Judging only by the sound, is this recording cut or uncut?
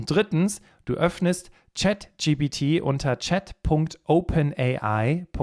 uncut